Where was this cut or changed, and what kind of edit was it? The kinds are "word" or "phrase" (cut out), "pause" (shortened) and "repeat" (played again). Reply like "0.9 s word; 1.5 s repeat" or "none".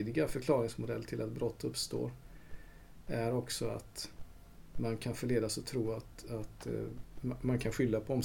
7.2 s word